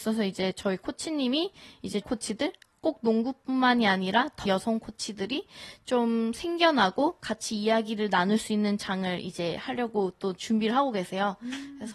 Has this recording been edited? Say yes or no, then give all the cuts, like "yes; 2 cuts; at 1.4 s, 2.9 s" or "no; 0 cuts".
yes; 2 cuts; at 2.0 s, 4.5 s